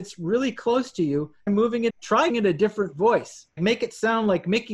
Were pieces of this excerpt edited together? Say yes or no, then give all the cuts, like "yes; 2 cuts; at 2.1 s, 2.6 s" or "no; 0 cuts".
yes; 4 cuts; at 1.5 s, 1.9 s, 2.3 s, 3.6 s